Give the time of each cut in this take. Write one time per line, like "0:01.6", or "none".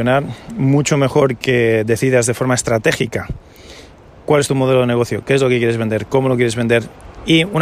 none